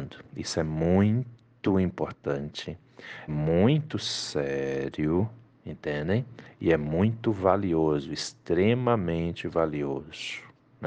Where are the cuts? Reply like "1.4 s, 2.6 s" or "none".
3.3 s